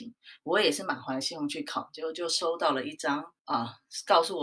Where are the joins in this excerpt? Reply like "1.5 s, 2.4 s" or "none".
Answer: 3.4 s